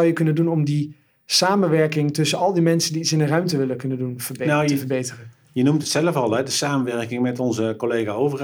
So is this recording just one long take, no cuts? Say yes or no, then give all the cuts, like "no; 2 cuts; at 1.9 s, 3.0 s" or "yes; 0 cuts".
yes; 0 cuts